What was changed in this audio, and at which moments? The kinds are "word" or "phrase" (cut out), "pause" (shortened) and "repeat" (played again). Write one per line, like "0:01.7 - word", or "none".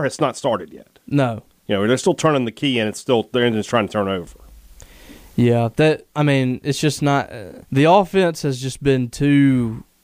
0:07.7 - pause